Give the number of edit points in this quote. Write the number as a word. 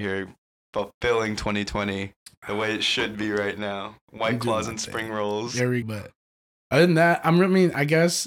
one